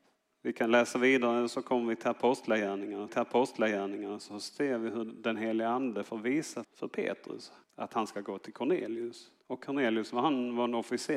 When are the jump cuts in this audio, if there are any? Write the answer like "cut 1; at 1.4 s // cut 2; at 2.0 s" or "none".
cut 1; at 3.1 s // cut 2; at 6.6 s // cut 3; at 7.6 s // cut 4; at 9.4 s